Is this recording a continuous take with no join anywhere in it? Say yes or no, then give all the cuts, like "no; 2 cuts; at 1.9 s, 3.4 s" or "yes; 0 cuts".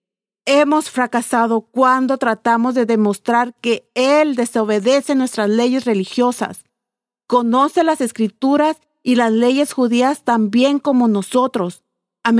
yes; 0 cuts